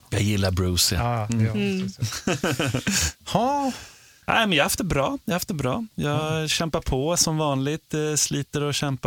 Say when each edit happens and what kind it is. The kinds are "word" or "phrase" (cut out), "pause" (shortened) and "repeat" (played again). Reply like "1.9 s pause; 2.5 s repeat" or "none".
none